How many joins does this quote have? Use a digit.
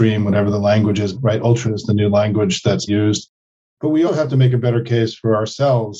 4